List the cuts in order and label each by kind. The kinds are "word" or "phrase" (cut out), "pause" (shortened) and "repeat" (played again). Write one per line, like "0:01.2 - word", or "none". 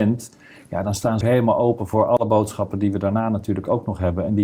0:01.2 - phrase